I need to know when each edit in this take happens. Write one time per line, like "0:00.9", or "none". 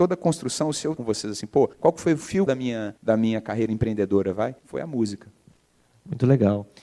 0:01.0
0:01.7
0:02.5
0:03.0
0:04.6